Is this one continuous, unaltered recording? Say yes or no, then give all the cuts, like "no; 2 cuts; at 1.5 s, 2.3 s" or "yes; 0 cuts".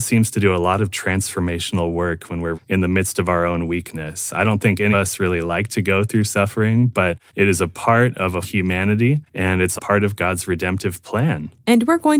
no; 6 cuts; at 2.5 s, 4.9 s, 7.3 s, 8.4 s, 9.3 s, 9.8 s